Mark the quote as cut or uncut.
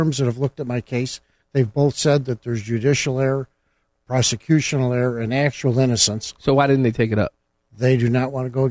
uncut